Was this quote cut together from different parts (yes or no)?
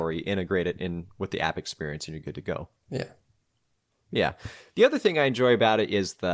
no